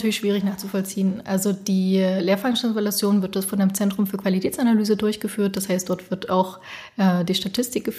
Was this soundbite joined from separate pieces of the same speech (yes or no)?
no